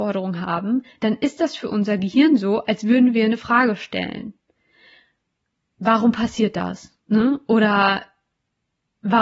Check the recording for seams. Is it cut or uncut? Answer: cut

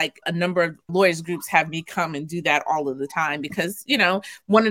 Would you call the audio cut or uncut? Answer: uncut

